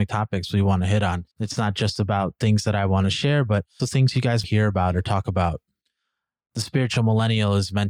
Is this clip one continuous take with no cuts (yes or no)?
no